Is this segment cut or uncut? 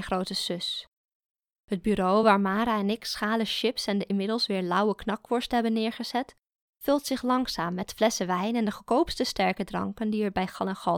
uncut